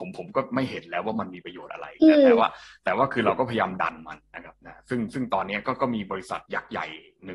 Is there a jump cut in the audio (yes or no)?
yes